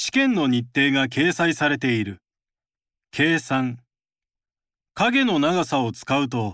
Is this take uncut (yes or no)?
no